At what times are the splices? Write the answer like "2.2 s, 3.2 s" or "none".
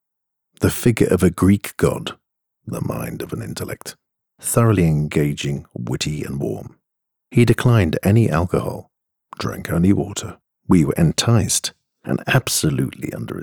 none